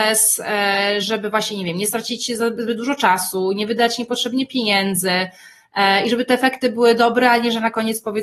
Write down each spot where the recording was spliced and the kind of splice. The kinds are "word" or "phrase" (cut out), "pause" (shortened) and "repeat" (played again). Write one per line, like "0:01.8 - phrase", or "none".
none